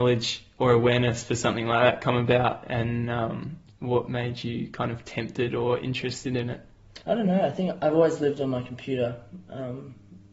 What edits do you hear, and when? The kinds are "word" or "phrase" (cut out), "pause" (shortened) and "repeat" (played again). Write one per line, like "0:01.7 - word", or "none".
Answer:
0:07.0 - pause